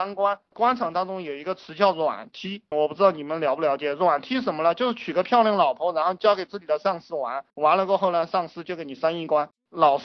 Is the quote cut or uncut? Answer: cut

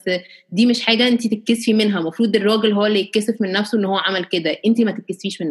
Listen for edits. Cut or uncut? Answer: uncut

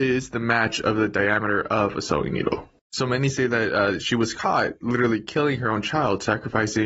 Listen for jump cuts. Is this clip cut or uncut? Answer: cut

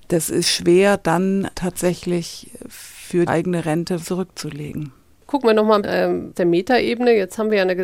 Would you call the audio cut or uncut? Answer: cut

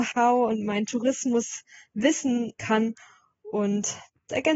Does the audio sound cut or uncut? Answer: cut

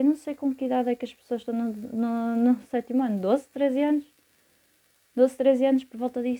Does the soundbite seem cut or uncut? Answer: uncut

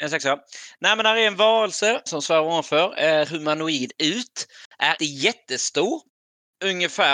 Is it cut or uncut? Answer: cut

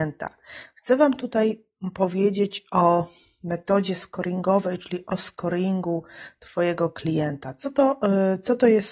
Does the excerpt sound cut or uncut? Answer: uncut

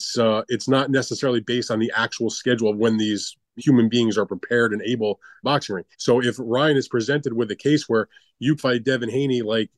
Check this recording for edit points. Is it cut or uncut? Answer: cut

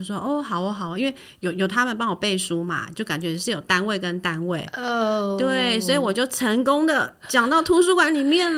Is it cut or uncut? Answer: uncut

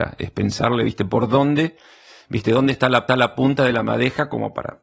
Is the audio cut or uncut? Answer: cut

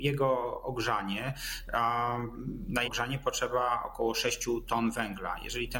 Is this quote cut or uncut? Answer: cut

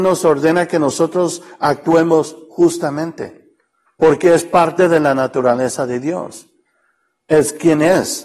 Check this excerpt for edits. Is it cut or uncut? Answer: cut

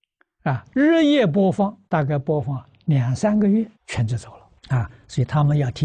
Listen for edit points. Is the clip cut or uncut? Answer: cut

